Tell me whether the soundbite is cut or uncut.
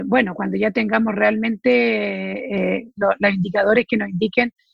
uncut